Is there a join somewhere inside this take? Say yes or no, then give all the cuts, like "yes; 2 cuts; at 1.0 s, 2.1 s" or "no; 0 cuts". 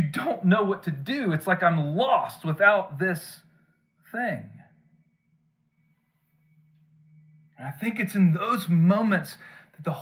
no; 0 cuts